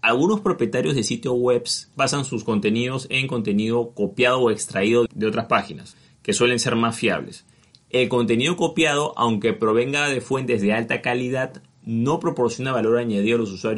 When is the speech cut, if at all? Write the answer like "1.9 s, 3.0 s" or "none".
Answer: none